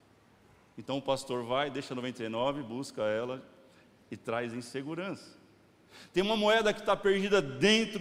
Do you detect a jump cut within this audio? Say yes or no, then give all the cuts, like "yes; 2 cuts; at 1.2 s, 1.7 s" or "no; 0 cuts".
no; 0 cuts